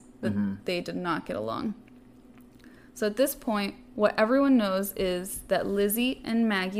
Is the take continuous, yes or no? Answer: yes